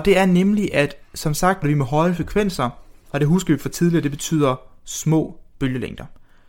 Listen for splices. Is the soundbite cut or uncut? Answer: cut